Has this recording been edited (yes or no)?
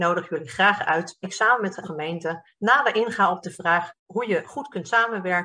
yes